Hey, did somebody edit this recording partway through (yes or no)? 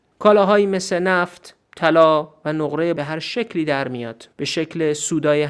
yes